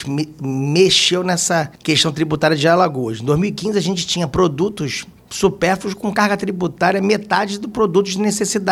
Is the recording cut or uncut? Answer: cut